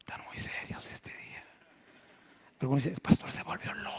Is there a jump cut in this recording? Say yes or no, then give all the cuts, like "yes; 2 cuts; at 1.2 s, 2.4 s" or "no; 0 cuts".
no; 0 cuts